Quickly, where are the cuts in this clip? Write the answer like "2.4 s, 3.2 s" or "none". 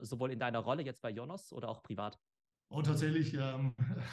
none